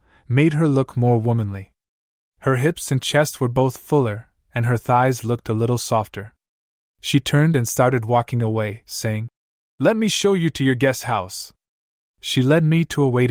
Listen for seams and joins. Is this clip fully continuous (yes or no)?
yes